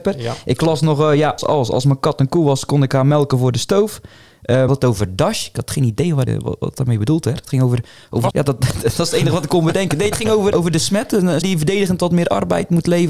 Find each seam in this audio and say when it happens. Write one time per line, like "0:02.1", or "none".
0:01.4
0:04.7
0:06.3
0:08.3
0:10.5
0:11.4